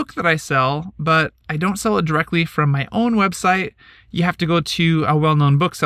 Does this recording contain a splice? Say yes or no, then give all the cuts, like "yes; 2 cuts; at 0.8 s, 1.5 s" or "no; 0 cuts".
no; 0 cuts